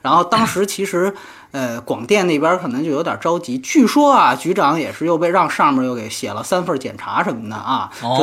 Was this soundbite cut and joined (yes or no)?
no